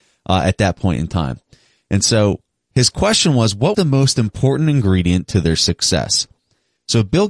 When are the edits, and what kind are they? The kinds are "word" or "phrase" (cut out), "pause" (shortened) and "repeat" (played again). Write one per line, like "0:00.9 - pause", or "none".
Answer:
0:03.7 - word